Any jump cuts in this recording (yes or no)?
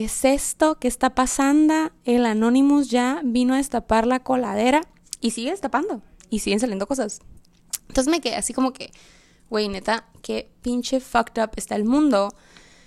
no